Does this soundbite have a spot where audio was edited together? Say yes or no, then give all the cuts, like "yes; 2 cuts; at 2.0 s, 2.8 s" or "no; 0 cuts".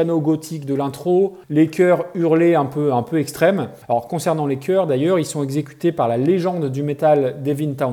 yes; 2 cuts; at 1.4 s, 3.8 s